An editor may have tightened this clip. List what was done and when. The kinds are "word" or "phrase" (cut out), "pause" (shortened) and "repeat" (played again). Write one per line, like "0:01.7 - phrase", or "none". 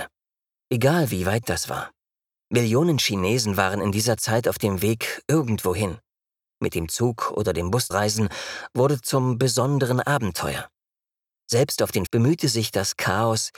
0:01.4 - word
0:07.9 - word
0:12.1 - word

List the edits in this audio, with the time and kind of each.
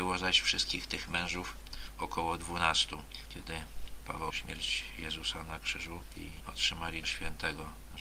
0:04.3 - phrase
0:06.2 - word
0:07.0 - word

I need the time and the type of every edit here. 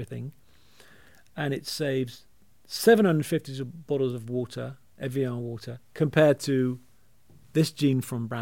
none

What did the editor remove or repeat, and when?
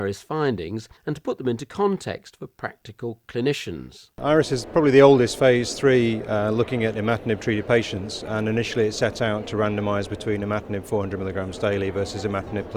0:01.0 - pause
0:04.1 - pause

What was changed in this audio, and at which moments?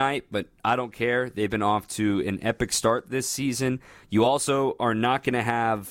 none

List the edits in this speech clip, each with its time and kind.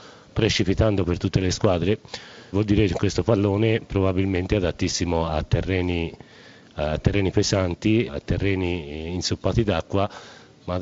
0:02.5 - word
0:05.3 - word
0:08.1 - word

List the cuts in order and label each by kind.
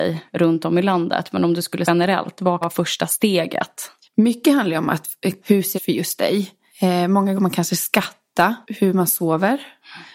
0:01.8 - word
0:02.6 - word
0:05.4 - word
0:05.7 - word
0:07.3 - phrase
0:08.6 - pause

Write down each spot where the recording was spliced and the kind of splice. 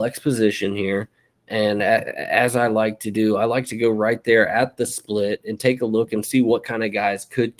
none

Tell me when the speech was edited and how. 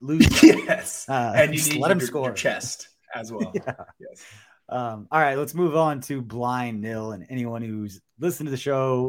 none

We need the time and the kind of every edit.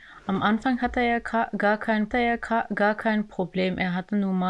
0:02.1 - repeat

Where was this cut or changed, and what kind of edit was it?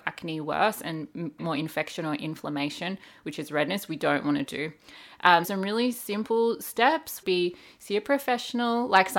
0:01.4 - word
0:03.9 - word
0:05.4 - word
0:07.2 - word

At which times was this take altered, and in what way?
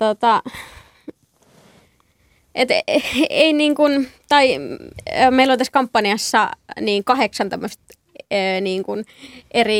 none

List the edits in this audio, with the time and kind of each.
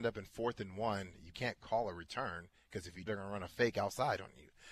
0:01.3 - word
0:03.1 - word

